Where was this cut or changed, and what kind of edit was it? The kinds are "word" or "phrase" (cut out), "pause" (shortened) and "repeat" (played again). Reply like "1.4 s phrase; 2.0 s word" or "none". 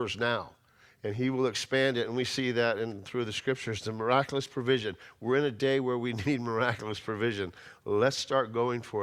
none